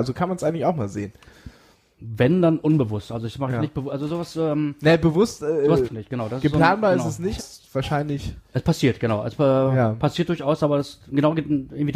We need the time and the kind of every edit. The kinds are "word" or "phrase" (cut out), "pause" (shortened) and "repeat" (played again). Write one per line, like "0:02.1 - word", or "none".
0:05.8 - word
0:07.4 - word